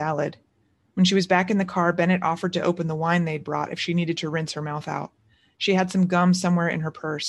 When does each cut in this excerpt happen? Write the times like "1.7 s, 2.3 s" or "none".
none

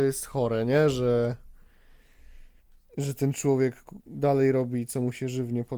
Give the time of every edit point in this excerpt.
2.6 s

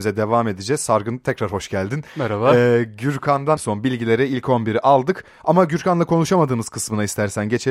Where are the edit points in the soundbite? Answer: 3.6 s

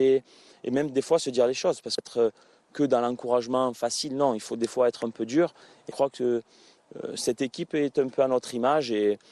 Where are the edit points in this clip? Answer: 2.0 s, 5.9 s

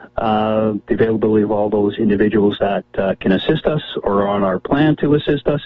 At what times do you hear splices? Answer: none

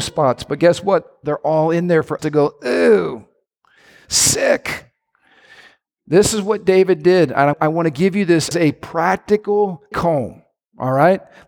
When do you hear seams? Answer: 2.2 s, 7.5 s, 8.5 s, 9.9 s

